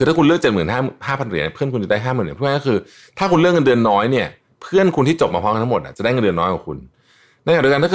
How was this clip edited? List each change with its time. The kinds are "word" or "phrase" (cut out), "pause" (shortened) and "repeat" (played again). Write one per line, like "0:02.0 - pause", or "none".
none